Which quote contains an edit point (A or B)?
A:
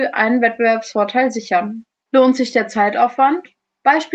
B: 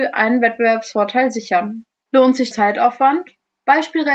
B